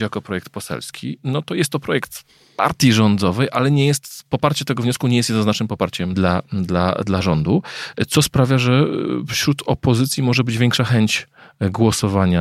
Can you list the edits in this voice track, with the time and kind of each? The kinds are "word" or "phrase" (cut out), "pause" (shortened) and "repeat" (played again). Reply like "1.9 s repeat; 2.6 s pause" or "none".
6.1 s word